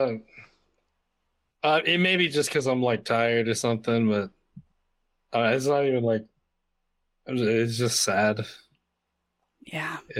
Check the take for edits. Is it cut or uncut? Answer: uncut